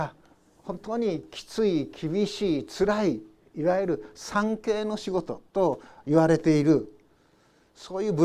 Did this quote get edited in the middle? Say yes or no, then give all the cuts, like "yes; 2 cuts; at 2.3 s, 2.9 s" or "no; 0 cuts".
yes; 1 cut; at 5.5 s